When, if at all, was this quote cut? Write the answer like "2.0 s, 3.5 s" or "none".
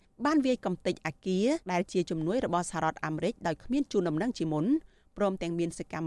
1.6 s